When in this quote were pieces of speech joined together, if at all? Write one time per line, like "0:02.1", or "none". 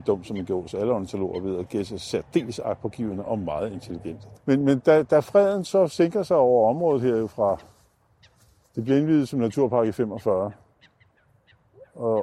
none